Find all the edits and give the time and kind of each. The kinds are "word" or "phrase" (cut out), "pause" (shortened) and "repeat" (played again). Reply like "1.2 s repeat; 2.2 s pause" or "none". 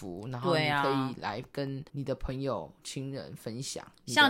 1.9 s pause